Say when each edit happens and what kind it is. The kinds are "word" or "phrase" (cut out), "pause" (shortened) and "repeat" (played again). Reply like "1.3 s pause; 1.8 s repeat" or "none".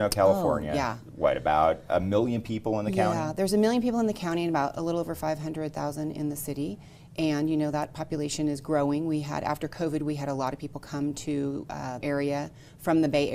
12.0 s word